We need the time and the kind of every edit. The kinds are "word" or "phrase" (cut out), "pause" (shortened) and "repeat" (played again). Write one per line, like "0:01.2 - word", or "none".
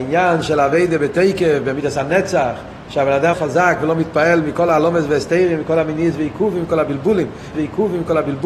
0:03.3 - word
0:07.5 - repeat